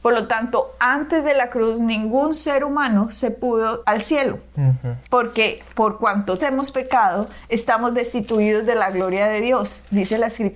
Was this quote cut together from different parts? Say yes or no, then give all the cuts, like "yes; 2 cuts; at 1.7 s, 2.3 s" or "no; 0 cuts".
yes; 3 cuts; at 3.8 s, 5.1 s, 6.4 s